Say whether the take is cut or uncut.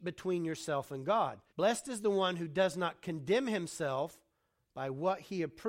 cut